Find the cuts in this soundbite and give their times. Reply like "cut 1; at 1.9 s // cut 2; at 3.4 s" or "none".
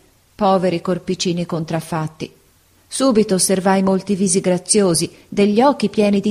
none